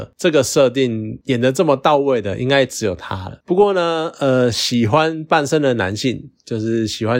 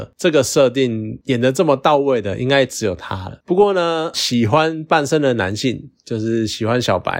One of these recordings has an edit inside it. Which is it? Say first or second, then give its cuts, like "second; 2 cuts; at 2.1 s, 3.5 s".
second; 1 cut; at 4.1 s